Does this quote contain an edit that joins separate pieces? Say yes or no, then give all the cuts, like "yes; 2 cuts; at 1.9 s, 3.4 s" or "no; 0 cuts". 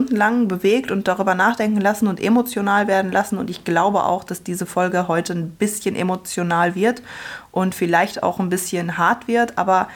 no; 0 cuts